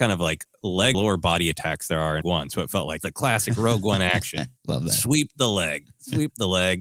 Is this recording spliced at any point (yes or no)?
yes